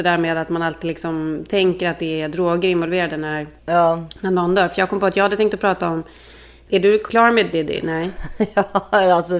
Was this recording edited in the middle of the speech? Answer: yes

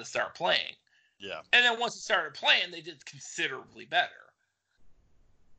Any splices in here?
no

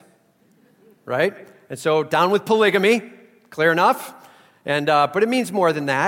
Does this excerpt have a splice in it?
no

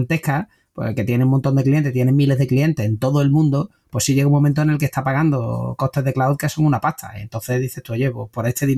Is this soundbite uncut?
yes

